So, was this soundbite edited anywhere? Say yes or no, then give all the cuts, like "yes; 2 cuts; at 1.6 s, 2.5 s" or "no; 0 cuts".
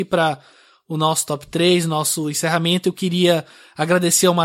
no; 0 cuts